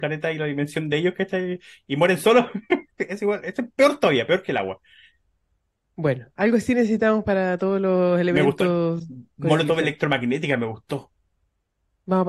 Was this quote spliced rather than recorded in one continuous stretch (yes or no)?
no